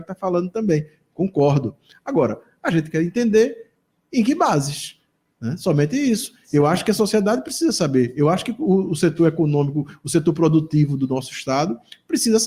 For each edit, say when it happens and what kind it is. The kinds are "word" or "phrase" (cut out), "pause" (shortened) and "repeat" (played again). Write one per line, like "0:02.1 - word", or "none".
none